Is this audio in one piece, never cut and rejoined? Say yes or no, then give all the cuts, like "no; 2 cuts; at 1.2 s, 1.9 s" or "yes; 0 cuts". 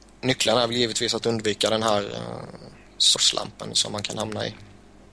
no; 1 cut; at 3.1 s